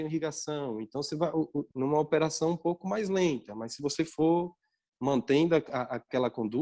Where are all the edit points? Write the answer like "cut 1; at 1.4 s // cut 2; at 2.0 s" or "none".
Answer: cut 1; at 1.7 s